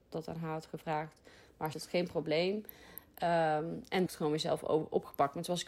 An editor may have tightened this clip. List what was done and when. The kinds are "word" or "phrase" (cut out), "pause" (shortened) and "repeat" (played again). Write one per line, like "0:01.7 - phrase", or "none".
0:01.7 - phrase
0:04.1 - phrase